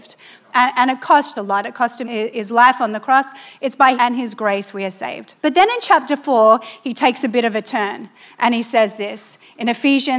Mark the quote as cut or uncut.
cut